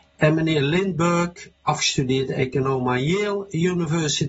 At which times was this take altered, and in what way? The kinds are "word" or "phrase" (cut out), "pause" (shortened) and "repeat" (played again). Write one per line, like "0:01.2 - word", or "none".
none